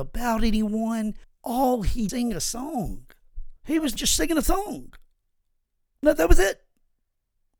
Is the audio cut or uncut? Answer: cut